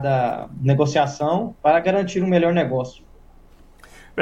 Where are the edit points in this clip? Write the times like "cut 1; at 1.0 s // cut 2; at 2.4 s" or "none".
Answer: cut 1; at 1.6 s